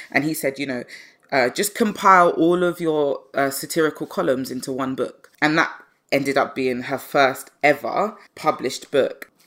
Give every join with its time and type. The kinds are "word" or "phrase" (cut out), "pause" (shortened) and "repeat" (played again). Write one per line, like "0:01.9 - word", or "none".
0:05.3 - pause
0:08.3 - pause